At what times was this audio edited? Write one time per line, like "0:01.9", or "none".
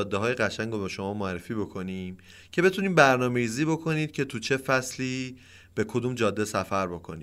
none

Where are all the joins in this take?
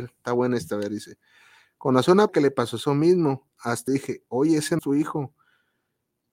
0:02.3
0:03.9
0:04.8

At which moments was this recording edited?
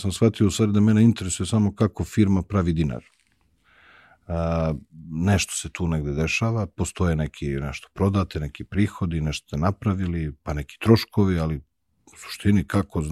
none

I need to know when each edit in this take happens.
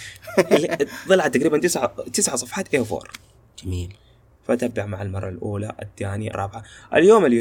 0:06.3

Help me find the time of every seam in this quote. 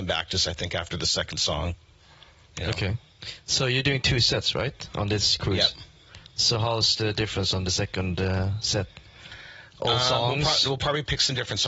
none

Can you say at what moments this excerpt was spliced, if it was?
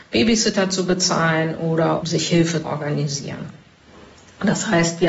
0:02.0
0:02.6

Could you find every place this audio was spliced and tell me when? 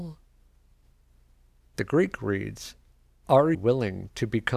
0:03.5

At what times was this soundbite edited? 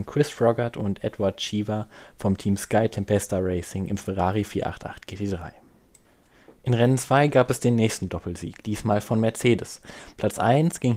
none

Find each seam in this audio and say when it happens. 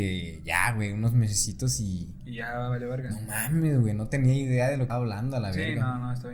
0:04.9

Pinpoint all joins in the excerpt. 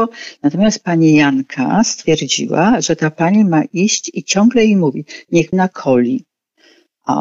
0:05.5

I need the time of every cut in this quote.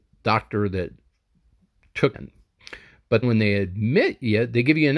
0:02.1
0:03.2

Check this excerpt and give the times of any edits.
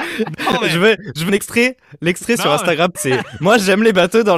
0:01.3
0:03.0

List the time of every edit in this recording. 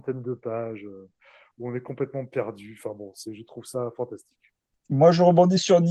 none

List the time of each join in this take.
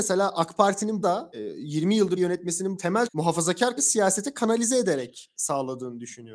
0:01.0
0:02.2
0:02.8
0:03.1
0:03.8

